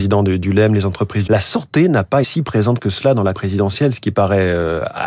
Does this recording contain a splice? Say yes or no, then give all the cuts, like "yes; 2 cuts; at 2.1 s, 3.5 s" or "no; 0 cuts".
yes; 3 cuts; at 1.3 s, 2.2 s, 3.3 s